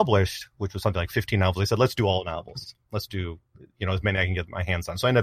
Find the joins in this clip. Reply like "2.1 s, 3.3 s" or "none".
none